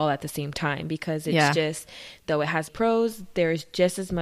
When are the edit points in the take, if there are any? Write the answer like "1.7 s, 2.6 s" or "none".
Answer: 2.7 s